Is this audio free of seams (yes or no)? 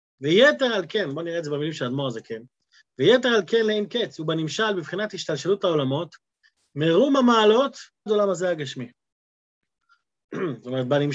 no